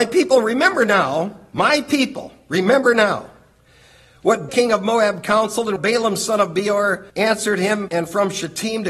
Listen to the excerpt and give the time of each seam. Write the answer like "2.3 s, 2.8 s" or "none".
4.5 s, 5.8 s, 7.1 s

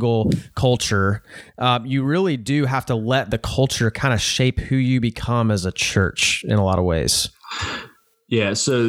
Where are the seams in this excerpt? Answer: none

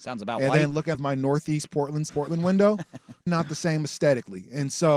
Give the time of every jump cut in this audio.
0.9 s, 2.1 s, 3.3 s

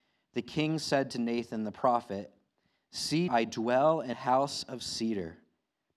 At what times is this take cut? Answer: 3.3 s, 4.1 s

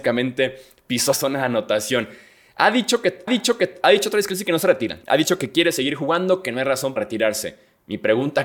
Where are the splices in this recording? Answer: 1.1 s, 3.3 s, 5.0 s, 7.0 s

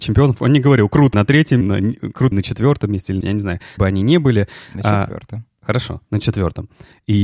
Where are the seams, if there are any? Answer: 1.1 s, 1.6 s, 2.3 s, 3.2 s, 3.8 s

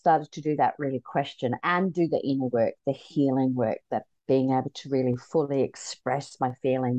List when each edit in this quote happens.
none

